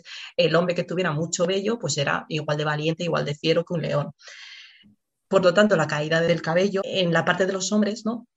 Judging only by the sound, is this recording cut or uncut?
uncut